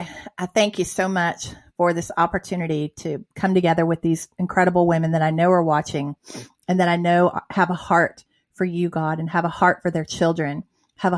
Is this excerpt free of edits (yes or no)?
yes